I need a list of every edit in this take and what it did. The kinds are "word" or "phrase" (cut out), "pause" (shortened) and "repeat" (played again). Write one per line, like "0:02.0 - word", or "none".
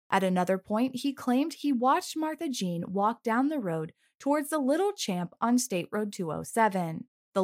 none